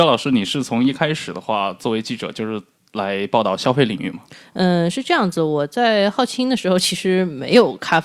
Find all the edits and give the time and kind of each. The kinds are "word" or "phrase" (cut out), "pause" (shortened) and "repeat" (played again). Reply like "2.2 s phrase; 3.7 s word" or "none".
none